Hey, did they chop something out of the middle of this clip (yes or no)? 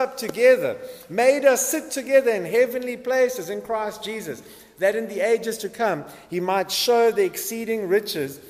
no